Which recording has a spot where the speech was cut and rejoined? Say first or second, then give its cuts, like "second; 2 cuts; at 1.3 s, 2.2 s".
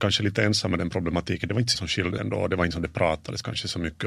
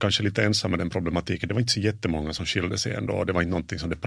first; 3 cuts; at 1.7 s, 2.2 s, 2.7 s